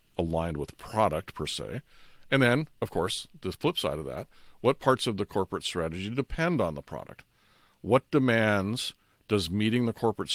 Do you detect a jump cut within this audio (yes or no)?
no